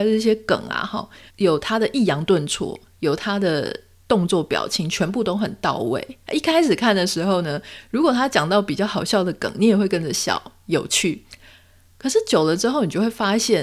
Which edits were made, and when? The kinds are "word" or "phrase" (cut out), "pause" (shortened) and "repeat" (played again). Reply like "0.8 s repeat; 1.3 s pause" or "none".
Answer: 1.3 s phrase